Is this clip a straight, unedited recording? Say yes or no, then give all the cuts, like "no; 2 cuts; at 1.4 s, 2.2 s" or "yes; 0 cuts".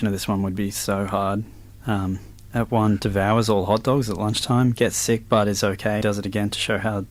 no; 2 cuts; at 3.0 s, 6.0 s